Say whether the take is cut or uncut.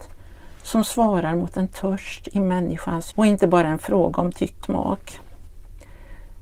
cut